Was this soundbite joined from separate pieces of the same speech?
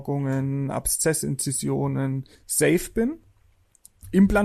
yes; 1 cut; at 2.3 s

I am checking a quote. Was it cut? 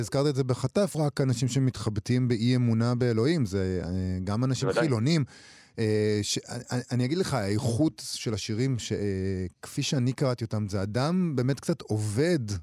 yes; 2 cuts; at 0.9 s, 9.5 s

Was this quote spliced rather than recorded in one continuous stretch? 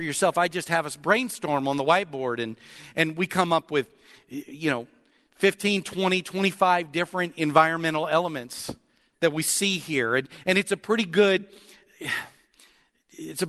no; 0 cuts

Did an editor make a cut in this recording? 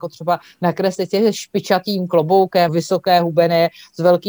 yes; 1 cut; at 2.7 s

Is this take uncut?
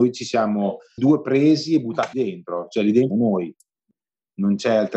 no; 3 cuts; at 1.0 s, 2.1 s, 3.1 s

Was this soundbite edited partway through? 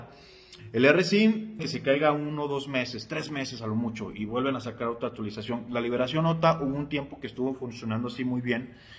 yes; 1 cut; at 1.6 s

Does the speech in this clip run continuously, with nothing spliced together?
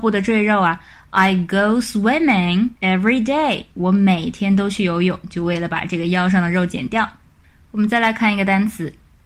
no; 1 cut; at 2.8 s

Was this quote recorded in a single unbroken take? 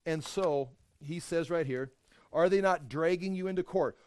yes; 0 cuts

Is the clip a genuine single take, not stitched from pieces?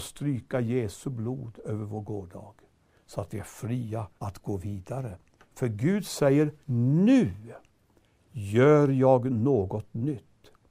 no; 3 cuts; at 4.2 s, 5.4 s, 6.6 s

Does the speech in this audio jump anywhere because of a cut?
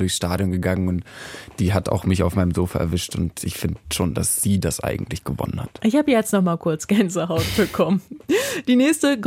no; 0 cuts

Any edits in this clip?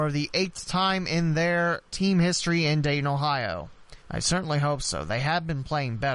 yes; 2 cuts; at 1.9 s, 4.0 s

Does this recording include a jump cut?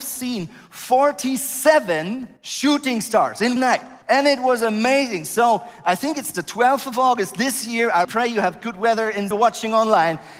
yes; 5 cuts; at 2.4 s, 3.6 s, 4.0 s, 8.0 s, 9.3 s

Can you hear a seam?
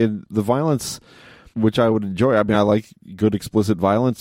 no; 0 cuts

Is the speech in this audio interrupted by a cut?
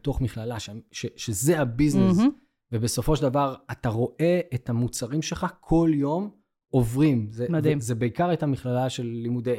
no; 0 cuts

